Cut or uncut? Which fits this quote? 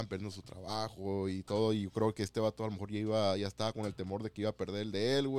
uncut